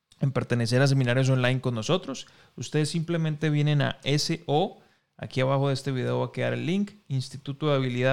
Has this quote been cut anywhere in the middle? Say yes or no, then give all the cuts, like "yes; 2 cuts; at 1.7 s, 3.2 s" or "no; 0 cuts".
no; 0 cuts